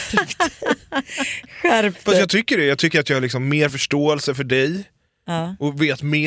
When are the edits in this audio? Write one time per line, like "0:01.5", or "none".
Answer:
none